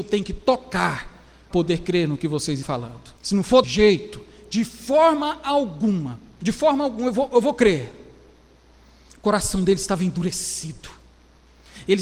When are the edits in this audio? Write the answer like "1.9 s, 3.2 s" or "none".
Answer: 1.5 s, 2.6 s, 3.2 s, 3.6 s, 8.7 s

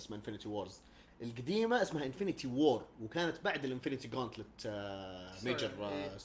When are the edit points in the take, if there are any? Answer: none

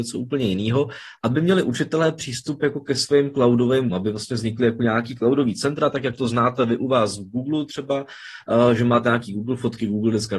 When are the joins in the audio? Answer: 3.9 s

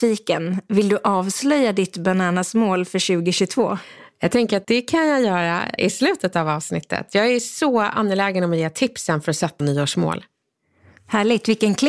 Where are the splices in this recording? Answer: 4.6 s, 5.8 s, 9.6 s

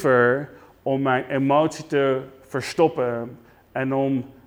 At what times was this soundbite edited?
none

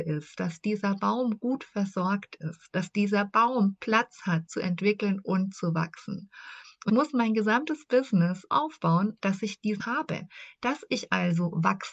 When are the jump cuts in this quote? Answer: 4.5 s, 6.9 s, 8.5 s, 9.8 s

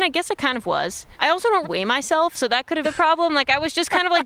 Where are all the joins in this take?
1.1 s, 1.6 s, 2.8 s

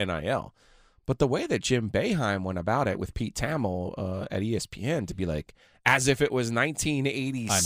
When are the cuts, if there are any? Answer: none

